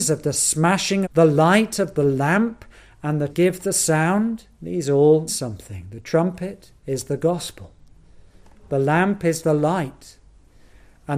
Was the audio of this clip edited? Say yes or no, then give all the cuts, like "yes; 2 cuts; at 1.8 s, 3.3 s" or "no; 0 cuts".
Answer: yes; 5 cuts; at 1.0 s, 3.3 s, 4.5 s, 5.3 s, 6.8 s